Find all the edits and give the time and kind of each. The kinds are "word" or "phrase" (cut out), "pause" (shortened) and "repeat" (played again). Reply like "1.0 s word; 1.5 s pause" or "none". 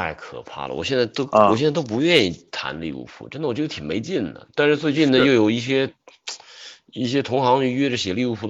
none